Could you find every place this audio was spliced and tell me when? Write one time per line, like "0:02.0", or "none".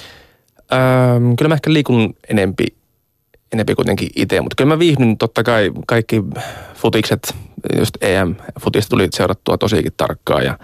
none